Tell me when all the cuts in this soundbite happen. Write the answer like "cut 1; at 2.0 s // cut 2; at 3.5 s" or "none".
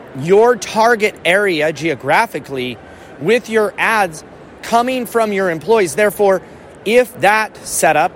none